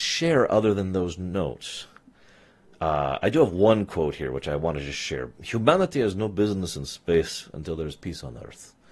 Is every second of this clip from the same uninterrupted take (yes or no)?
yes